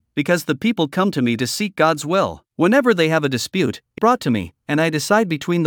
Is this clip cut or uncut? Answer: cut